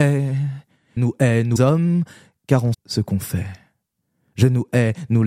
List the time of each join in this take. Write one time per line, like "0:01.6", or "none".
0:01.0
0:01.6
0:02.7

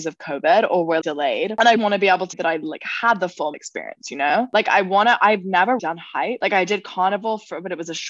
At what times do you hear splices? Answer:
0:01.0
0:01.8
0:02.3
0:03.5
0:05.8

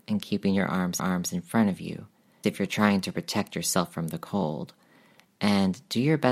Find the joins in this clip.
0:01.0
0:02.4

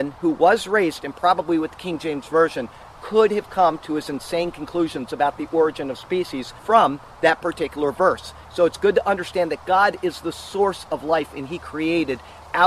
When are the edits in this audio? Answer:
0:01.0
0:06.6

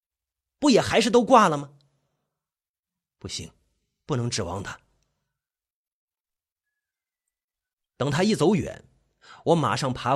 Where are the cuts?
none

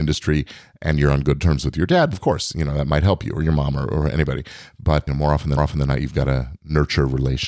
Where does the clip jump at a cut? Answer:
0:02.1
0:05.1
0:05.6

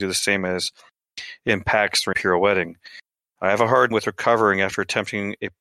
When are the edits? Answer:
0:02.1
0:03.9

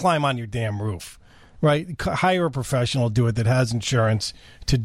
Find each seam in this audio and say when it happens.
none

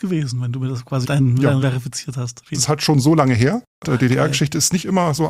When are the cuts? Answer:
0:01.0
0:01.6
0:02.5
0:03.8

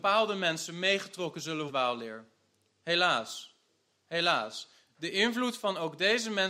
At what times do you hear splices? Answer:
0:01.7

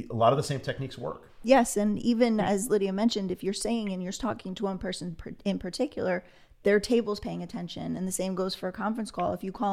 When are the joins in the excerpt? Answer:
none

